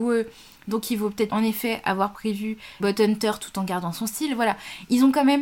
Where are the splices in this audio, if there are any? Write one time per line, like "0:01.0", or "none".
0:01.3
0:02.8